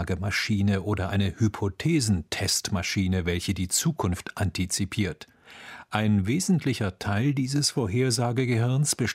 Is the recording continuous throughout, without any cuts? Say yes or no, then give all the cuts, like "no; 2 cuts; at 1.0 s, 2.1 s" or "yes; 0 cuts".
yes; 0 cuts